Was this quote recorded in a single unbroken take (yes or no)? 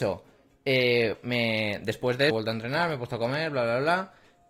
no